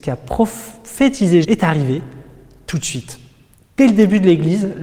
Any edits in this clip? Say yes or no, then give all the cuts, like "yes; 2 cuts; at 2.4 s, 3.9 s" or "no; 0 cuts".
yes; 1 cut; at 1.4 s